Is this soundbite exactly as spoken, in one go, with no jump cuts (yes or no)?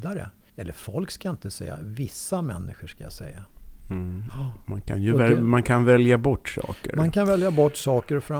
yes